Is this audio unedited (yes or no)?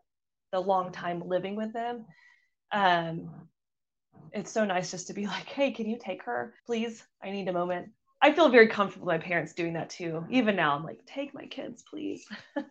no